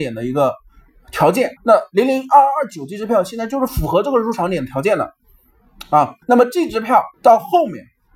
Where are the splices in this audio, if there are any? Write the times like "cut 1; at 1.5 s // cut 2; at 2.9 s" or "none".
cut 1; at 1.6 s // cut 2; at 6.2 s // cut 3; at 7.1 s